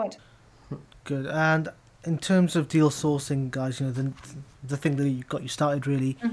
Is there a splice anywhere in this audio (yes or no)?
no